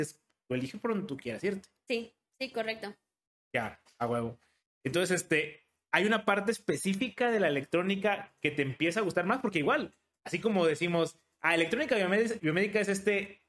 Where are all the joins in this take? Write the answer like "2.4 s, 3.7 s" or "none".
12.4 s